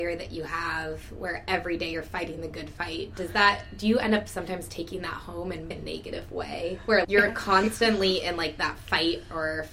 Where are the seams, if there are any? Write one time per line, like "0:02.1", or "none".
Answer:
0:05.7
0:07.0